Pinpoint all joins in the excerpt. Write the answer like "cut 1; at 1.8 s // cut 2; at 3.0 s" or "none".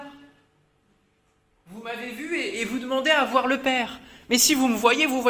none

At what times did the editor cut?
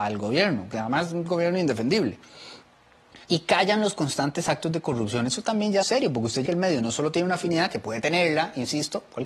cut 1; at 3.2 s // cut 2; at 5.8 s // cut 3; at 6.5 s

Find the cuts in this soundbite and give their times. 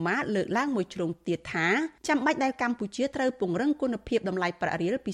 cut 1; at 2.0 s

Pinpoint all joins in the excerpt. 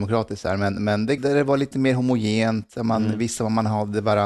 cut 1; at 1.2 s

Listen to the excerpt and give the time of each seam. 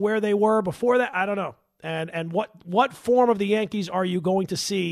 none

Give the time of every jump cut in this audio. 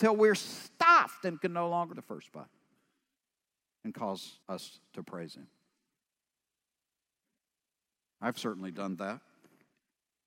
cut 1; at 1.9 s // cut 2; at 4.4 s

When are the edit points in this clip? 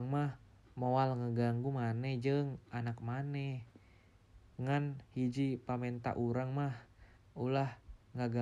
cut 1; at 7.2 s

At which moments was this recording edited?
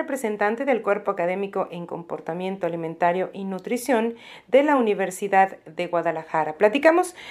none

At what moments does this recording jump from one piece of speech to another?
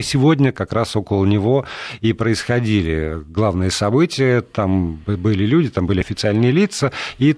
none

